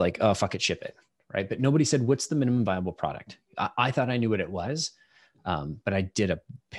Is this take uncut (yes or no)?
yes